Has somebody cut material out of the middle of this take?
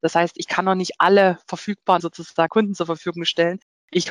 yes; 2 cuts; at 2.0 s, 2.5 s

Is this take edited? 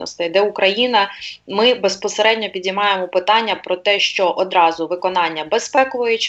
no; 0 cuts

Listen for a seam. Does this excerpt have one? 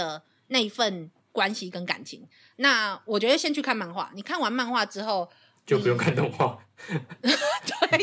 no; 0 cuts

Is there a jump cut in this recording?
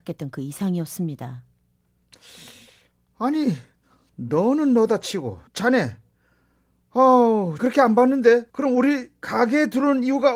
yes; 3 cuts; at 5.5 s, 7.6 s, 8.5 s

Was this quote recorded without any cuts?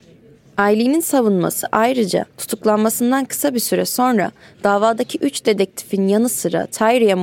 no; 1 cut; at 2.3 s

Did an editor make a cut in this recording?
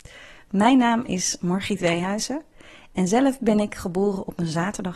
no; 0 cuts

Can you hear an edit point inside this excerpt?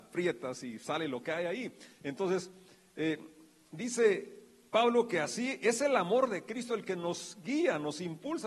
no; 0 cuts

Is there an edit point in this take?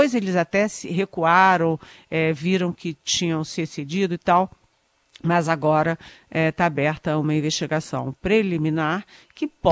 no; 0 cuts

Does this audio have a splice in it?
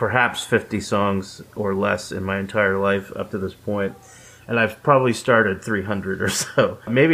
no; 0 cuts

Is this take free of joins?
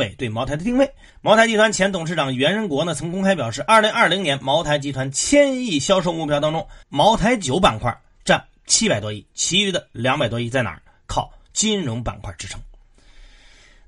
no; 2 cuts; at 1.1 s, 6.8 s

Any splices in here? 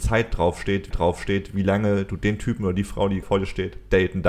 yes; 2 cuts; at 0.9 s, 3.2 s

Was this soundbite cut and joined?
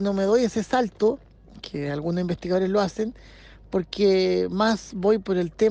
no; 0 cuts

